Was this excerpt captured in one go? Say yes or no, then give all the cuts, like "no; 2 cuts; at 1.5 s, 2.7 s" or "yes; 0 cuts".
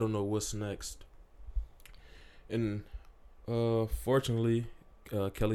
yes; 0 cuts